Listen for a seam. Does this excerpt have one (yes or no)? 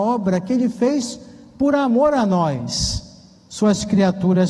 no